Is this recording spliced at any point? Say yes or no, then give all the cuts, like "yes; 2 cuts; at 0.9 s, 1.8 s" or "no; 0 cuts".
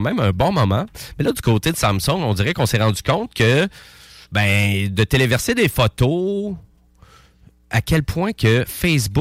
no; 0 cuts